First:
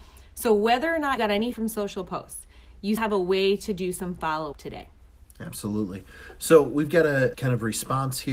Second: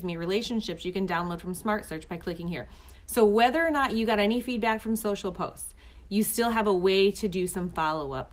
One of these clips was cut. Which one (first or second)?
first